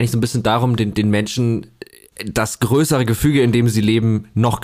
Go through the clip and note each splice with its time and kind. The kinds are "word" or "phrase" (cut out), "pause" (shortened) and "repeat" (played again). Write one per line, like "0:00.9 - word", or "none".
none